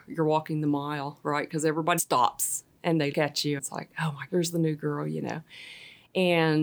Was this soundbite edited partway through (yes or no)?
yes